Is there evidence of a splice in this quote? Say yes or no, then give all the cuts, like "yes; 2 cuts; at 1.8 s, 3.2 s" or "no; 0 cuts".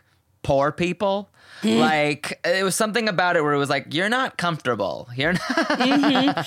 no; 0 cuts